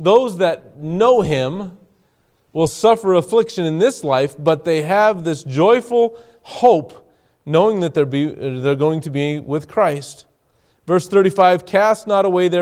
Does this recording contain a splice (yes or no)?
no